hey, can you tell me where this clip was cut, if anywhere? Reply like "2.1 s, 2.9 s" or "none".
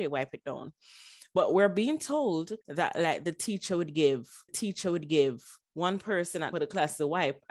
2.6 s, 4.5 s, 6.5 s